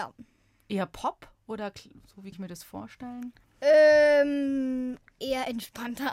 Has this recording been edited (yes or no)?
yes